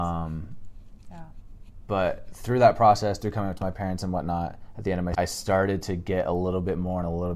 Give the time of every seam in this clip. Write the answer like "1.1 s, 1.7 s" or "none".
5.1 s

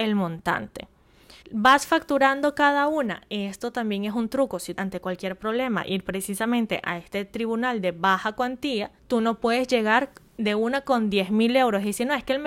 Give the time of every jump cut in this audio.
1.4 s, 4.8 s, 9.0 s

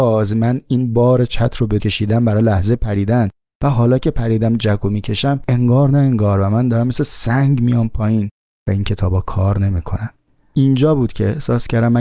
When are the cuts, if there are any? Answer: 1.8 s

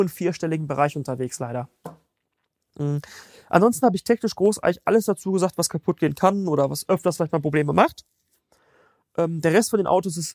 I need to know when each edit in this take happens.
none

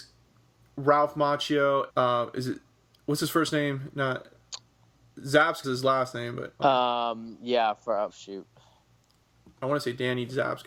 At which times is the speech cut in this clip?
1.9 s, 5.6 s, 6.6 s, 8.1 s

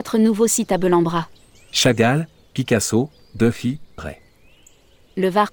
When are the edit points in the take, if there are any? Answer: 1.4 s, 4.0 s

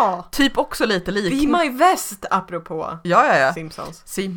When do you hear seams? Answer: none

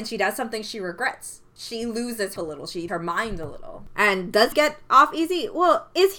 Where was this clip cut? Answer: 1.6 s, 2.4 s, 2.9 s, 4.5 s

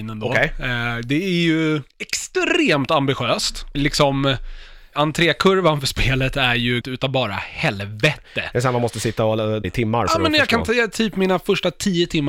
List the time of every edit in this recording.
1.9 s, 3.7 s, 4.9 s, 6.8 s, 9.6 s

